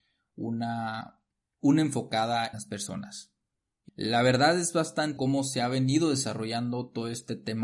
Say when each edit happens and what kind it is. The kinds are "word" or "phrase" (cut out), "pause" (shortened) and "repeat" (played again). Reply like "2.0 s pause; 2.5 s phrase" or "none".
2.5 s word; 3.9 s word; 5.2 s word